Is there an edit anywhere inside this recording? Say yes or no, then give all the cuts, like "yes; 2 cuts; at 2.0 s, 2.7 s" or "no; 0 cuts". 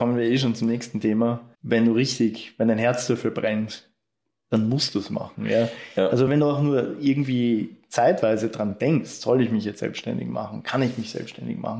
yes; 2 cuts; at 1.5 s, 6.3 s